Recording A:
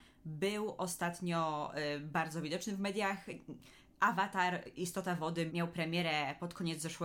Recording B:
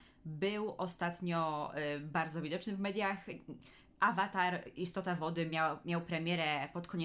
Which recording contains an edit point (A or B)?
A